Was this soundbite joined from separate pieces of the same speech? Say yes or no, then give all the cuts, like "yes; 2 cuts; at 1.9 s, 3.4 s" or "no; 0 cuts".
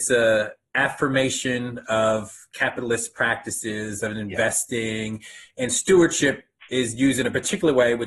no; 0 cuts